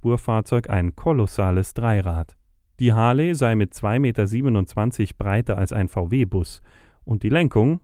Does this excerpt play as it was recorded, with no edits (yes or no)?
yes